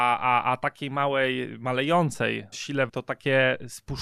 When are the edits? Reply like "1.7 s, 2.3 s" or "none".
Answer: 2.5 s, 2.9 s